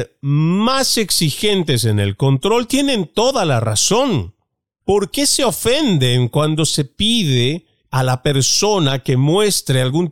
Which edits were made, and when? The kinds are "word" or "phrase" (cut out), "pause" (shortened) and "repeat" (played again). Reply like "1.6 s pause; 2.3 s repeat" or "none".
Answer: none